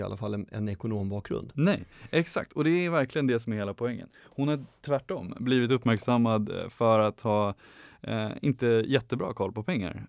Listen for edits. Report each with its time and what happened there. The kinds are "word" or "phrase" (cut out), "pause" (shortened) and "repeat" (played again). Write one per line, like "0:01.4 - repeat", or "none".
none